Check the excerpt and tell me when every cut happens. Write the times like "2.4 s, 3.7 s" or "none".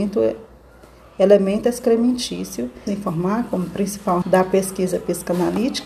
2.9 s, 4.2 s